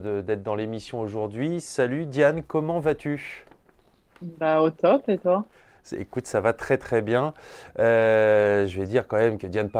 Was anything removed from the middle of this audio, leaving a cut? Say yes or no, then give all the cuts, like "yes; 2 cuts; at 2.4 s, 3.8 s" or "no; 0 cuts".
no; 0 cuts